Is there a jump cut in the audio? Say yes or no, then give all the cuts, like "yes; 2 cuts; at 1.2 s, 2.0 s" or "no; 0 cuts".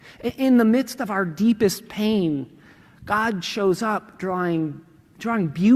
no; 0 cuts